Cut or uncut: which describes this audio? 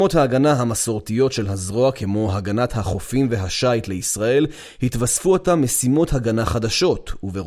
uncut